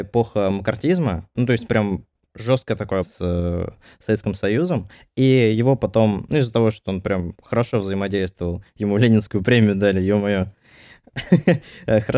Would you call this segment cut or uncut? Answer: cut